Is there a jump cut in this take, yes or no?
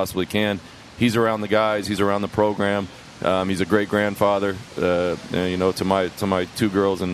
no